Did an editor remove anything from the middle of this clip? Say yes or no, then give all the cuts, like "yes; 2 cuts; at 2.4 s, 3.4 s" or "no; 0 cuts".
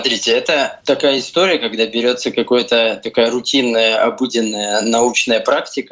no; 0 cuts